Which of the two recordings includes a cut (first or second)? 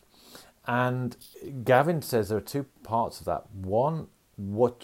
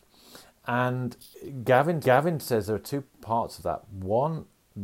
second